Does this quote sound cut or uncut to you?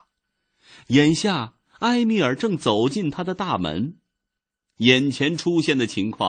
uncut